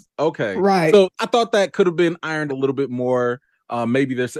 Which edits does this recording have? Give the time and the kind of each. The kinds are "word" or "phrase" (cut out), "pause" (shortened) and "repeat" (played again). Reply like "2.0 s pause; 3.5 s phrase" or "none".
1.1 s pause; 2.5 s word